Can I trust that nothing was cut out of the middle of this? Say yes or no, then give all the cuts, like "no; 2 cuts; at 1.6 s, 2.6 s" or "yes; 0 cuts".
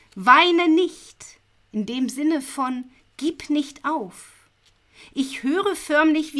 yes; 0 cuts